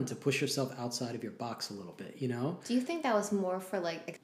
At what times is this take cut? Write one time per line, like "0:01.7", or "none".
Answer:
none